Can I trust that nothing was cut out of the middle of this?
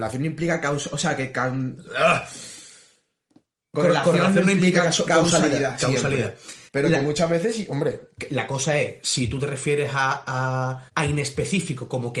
no; 2 cuts; at 6.7 s, 10.9 s

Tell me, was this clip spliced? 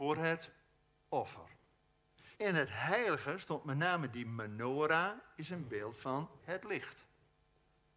yes; 2 cuts; at 2.3 s, 6.4 s

